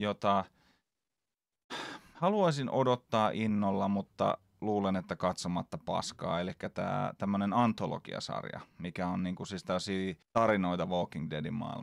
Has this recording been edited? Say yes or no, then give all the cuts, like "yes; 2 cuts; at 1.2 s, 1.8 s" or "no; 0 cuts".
yes; 1 cut; at 10.2 s